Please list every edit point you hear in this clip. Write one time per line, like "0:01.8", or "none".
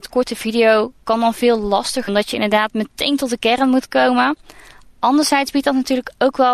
0:02.1